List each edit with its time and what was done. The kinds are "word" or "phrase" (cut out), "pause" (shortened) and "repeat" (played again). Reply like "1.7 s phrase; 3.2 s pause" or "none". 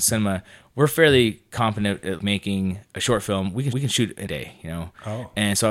2.2 s word; 3.7 s repeat; 4.3 s word